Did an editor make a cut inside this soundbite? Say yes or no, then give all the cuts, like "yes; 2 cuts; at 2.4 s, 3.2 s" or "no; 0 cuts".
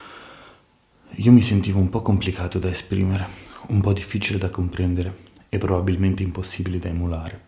no; 0 cuts